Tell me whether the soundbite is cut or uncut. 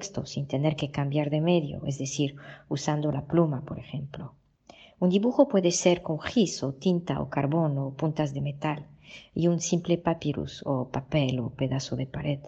uncut